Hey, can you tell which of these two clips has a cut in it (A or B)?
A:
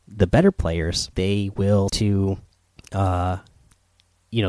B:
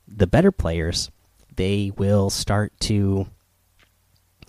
A